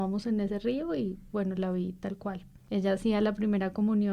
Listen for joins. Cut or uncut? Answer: uncut